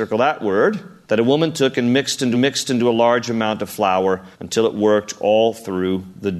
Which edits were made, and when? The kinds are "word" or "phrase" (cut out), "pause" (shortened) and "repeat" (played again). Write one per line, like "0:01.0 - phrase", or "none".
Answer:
0:01.0 - pause
0:02.3 - repeat
0:04.3 - pause